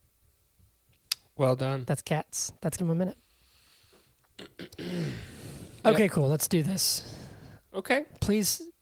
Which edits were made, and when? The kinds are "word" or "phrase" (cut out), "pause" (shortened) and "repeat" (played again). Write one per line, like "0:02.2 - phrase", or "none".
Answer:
0:02.8 - word